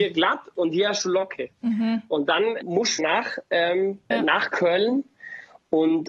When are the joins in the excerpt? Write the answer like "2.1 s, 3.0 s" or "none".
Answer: 1.5 s, 2.6 s, 3.0 s, 4.1 s